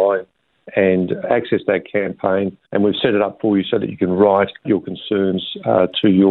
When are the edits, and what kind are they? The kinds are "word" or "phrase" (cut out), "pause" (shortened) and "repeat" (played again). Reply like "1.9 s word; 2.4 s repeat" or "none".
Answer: 1.2 s word; 2.6 s pause; 4.6 s word